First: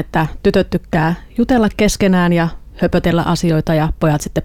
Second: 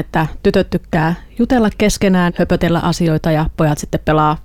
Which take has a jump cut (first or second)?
second